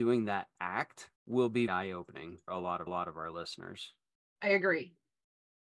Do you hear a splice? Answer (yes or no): yes